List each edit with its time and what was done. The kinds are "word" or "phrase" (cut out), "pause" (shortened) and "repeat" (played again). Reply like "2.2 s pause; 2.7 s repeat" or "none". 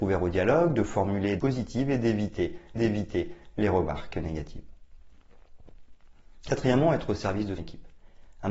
1.4 s phrase; 2.8 s repeat; 7.6 s word